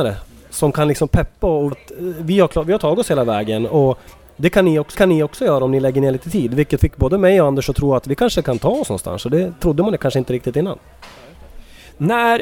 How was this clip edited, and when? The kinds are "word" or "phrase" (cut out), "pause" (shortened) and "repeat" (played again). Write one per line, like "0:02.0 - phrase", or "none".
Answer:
0:01.7 - word
0:04.9 - repeat
0:06.8 - word